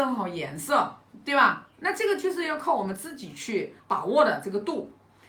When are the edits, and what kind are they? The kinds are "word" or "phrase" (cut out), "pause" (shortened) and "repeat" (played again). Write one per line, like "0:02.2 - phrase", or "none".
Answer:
0:03.8 - pause